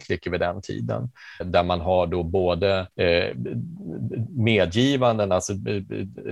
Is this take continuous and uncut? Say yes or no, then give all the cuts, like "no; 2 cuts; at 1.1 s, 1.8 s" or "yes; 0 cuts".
no; 2 cuts; at 1.4 s, 2.9 s